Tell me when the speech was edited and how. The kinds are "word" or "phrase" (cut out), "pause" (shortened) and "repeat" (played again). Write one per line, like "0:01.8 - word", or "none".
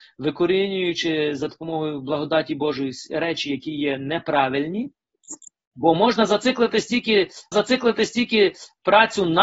0:07.5 - repeat